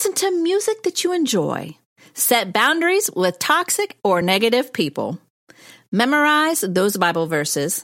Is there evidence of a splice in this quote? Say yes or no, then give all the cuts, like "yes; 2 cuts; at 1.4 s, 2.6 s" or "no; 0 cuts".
no; 0 cuts